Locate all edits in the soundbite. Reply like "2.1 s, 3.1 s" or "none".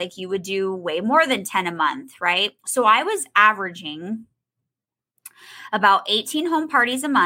2.6 s